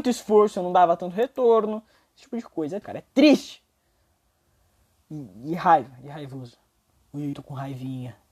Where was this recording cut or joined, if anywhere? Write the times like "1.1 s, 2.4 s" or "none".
2.8 s, 7.3 s